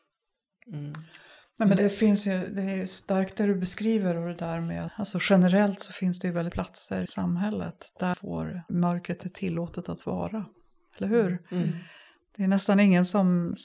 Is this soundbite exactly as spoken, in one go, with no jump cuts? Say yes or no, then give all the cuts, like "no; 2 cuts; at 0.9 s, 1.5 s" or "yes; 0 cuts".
no; 6 cuts; at 1.8 s, 4.9 s, 6.5 s, 7.1 s, 8.1 s, 8.7 s